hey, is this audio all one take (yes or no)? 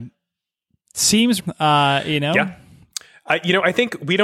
no